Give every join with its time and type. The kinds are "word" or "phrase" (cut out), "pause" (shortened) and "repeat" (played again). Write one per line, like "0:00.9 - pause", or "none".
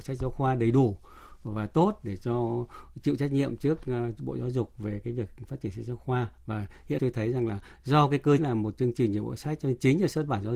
0:07.0 - word
0:08.4 - word